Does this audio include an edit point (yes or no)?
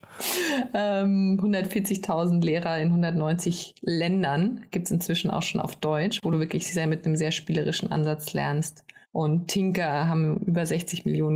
yes